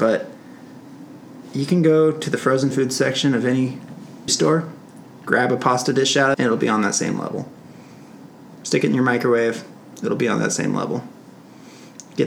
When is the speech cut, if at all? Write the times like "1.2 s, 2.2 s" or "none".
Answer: 4.3 s, 6.3 s